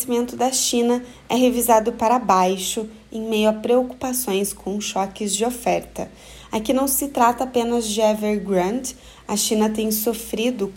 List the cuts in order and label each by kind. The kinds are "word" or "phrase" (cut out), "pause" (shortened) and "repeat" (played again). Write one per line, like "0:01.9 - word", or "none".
none

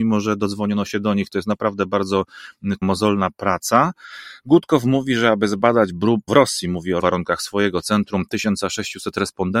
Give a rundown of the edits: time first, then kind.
0:02.8 - word
0:06.3 - word
0:07.0 - word

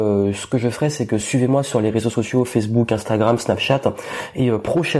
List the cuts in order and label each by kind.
none

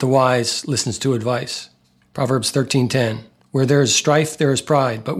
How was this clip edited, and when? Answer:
0:02.0 - pause
0:03.4 - pause

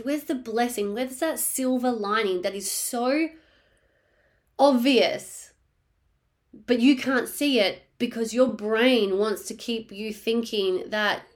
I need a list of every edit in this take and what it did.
none

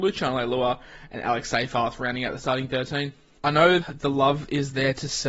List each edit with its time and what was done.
0:03.8 - word

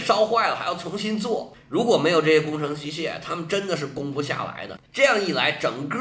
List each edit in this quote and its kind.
0:04.9 - pause

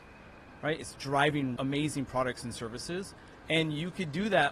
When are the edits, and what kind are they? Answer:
0:01.6 - phrase

